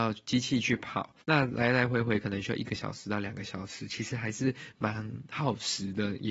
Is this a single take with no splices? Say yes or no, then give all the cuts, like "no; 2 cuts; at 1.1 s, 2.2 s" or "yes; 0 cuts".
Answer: no; 1 cut; at 1.2 s